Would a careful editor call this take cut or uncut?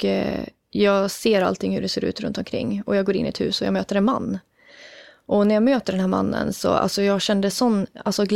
uncut